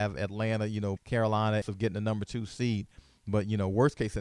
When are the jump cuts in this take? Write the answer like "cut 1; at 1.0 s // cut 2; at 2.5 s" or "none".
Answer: cut 1; at 1.0 s // cut 2; at 1.6 s